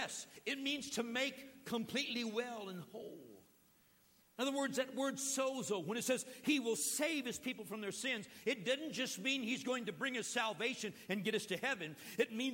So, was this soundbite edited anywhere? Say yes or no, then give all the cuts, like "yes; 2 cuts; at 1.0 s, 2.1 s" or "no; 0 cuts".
no; 0 cuts